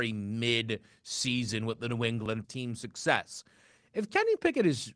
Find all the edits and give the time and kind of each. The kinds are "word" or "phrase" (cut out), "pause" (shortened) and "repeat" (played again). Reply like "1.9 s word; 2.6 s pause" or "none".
2.4 s phrase